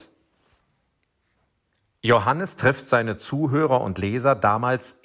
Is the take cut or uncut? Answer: uncut